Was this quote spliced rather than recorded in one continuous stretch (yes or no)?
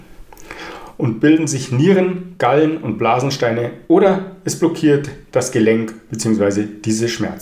no